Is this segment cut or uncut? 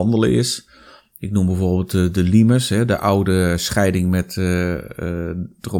uncut